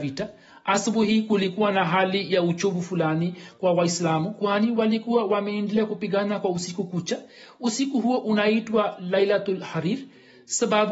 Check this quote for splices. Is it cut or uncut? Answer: uncut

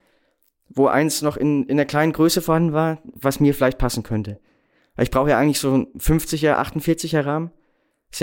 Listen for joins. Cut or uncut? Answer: uncut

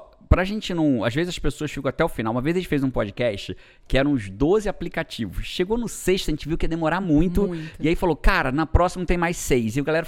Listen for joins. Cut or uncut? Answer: uncut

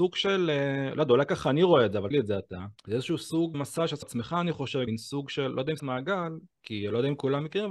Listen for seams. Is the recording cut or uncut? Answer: cut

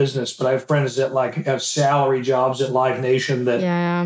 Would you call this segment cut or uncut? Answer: uncut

